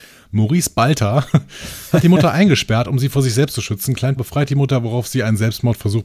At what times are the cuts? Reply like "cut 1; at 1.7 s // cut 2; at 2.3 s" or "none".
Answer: cut 1; at 4.2 s